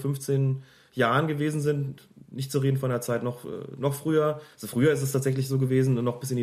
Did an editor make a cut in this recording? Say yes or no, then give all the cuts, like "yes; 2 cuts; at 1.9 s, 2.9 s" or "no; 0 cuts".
no; 0 cuts